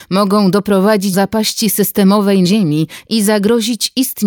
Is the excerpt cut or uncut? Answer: cut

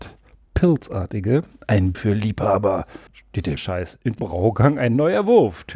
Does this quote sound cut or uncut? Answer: cut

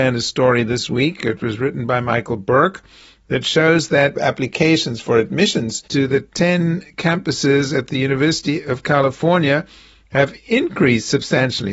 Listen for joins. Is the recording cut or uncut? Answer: uncut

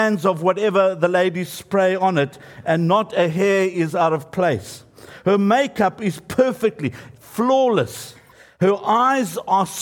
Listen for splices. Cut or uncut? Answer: cut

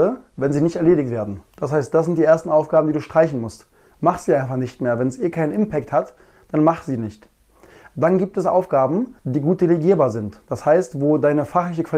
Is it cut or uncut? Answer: cut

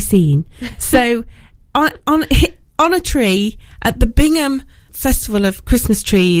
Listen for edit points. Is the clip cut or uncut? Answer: cut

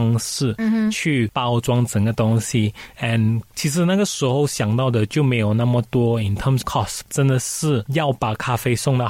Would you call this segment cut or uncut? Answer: cut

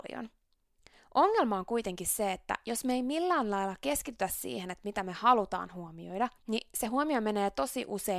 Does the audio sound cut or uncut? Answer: cut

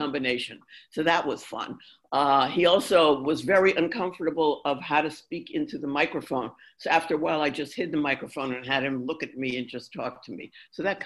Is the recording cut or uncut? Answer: uncut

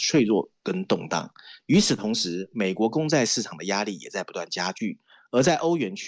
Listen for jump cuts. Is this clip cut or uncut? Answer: uncut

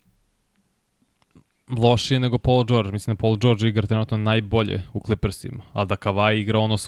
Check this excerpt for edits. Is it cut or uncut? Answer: uncut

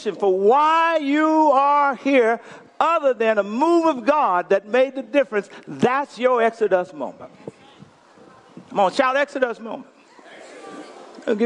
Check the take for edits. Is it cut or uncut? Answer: uncut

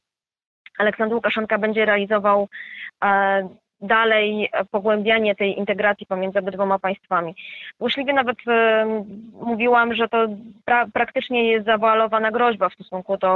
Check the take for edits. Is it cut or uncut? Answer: uncut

